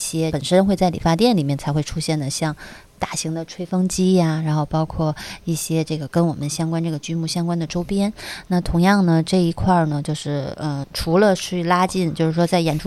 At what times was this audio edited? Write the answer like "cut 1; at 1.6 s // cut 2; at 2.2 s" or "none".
cut 1; at 10.8 s